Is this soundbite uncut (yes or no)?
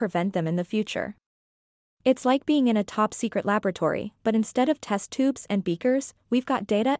yes